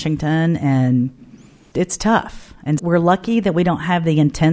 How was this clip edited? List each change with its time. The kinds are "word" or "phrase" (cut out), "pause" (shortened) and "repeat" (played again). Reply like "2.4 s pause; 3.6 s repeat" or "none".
1.7 s word; 2.8 s word